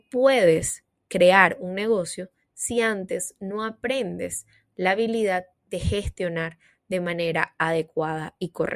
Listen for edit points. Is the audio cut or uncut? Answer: uncut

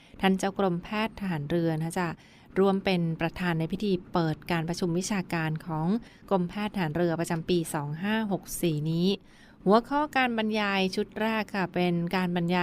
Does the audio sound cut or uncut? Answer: uncut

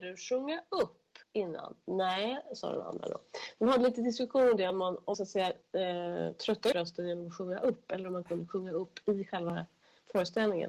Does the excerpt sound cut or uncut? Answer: cut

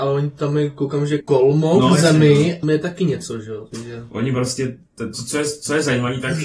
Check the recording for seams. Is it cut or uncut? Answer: cut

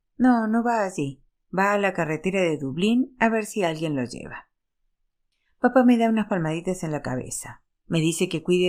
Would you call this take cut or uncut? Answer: uncut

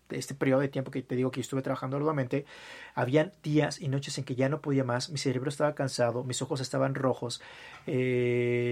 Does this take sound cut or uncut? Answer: uncut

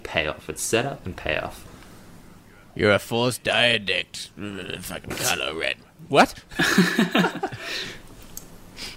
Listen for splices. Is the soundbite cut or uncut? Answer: uncut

